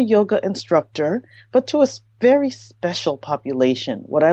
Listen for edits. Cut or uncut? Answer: uncut